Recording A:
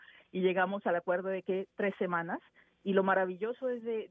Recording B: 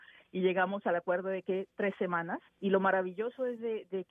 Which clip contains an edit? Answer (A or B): B